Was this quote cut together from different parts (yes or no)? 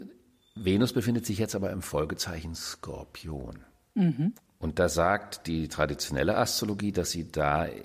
no